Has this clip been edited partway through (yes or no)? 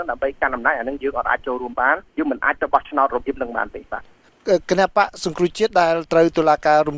yes